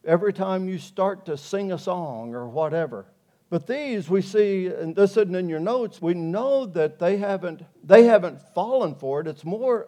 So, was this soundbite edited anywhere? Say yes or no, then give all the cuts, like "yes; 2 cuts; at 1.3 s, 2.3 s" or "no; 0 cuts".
yes; 2 cuts; at 3.3 s, 6.0 s